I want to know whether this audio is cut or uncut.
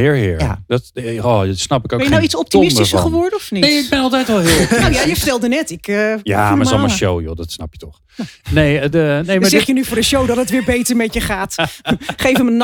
uncut